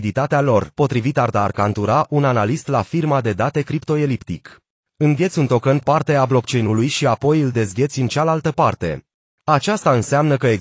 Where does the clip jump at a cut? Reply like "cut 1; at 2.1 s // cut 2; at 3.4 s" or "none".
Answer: cut 1; at 4.7 s // cut 2; at 5.8 s // cut 3; at 9.2 s